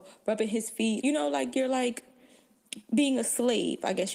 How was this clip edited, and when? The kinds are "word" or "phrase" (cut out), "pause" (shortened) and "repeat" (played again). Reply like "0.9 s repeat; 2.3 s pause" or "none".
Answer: 1.0 s word